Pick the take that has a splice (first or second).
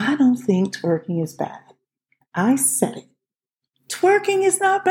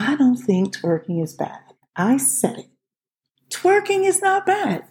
second